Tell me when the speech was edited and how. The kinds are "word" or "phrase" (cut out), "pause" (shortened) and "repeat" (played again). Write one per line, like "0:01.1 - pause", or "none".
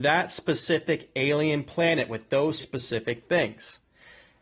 0:02.6 - phrase